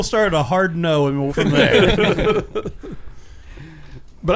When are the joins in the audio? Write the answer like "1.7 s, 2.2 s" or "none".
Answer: 1.3 s